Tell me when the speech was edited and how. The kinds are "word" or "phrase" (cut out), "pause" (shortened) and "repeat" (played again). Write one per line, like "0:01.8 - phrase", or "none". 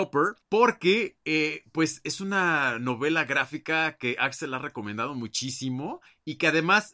none